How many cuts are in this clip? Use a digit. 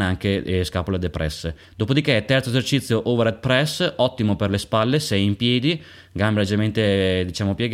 1